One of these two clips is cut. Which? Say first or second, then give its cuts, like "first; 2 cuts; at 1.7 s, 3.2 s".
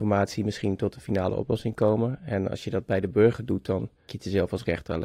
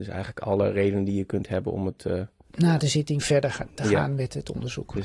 first; 1 cut; at 4.1 s